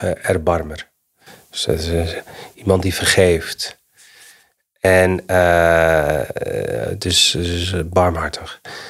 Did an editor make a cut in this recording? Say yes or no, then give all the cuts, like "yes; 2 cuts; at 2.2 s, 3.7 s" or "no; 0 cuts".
no; 0 cuts